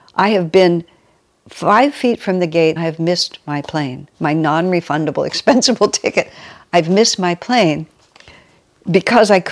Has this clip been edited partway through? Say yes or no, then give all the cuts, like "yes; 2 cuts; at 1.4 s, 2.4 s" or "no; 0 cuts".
yes; 1 cut; at 2.8 s